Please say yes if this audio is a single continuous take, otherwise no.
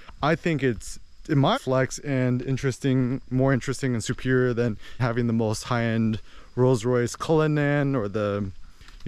no